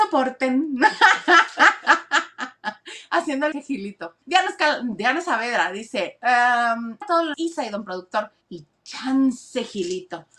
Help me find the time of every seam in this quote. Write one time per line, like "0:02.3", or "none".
0:03.5
0:04.2
0:07.0
0:07.3
0:08.4